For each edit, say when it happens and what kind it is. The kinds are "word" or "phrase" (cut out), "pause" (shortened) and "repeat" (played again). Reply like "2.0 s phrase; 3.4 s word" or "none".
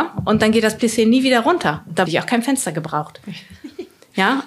2.1 s word